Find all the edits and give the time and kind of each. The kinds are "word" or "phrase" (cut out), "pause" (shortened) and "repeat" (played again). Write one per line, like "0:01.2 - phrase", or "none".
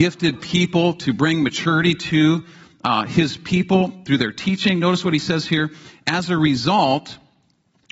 none